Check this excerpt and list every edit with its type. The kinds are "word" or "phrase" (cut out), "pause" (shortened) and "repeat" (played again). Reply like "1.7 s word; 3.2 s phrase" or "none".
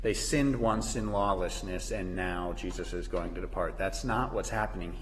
none

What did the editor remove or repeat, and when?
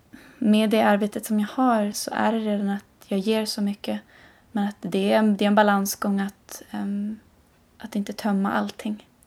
1.9 s word

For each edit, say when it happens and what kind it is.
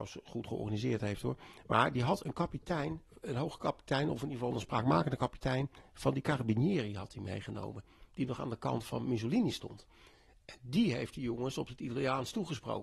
none

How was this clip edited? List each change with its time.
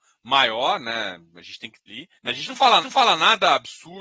1.9 s word; 2.2 s pause; 2.8 s repeat

